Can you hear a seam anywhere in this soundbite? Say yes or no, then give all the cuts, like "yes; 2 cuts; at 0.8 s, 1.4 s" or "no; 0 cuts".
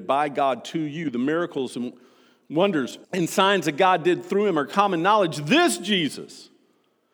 yes; 1 cut; at 3.0 s